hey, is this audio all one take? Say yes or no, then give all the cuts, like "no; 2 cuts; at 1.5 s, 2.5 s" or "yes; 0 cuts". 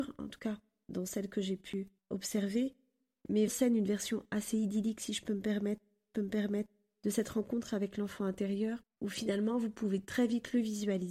no; 4 cuts; at 2.0 s, 3.5 s, 6.1 s, 8.8 s